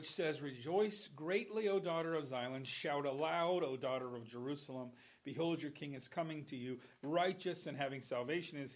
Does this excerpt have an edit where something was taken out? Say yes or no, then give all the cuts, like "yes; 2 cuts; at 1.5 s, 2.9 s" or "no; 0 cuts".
no; 0 cuts